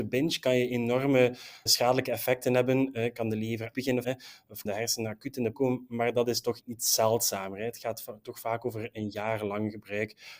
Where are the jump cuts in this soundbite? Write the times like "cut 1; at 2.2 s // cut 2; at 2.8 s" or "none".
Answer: cut 1; at 1.7 s // cut 2; at 3.7 s // cut 3; at 4.0 s // cut 4; at 4.6 s // cut 5; at 5.5 s // cut 6; at 6.6 s